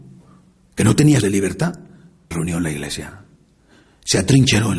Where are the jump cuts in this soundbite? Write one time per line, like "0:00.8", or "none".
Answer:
0:01.2
0:02.3